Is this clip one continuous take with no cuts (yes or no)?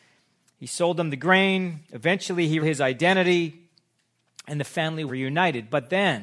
no